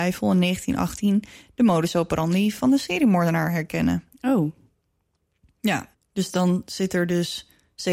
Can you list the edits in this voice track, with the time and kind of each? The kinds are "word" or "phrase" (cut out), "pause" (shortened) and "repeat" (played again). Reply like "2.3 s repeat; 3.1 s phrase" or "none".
5.9 s pause